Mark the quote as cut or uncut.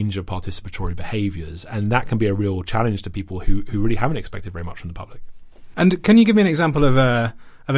uncut